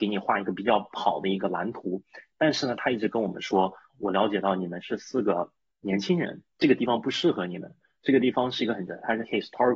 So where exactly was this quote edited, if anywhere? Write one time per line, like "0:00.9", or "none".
0:03.9
0:06.5
0:08.9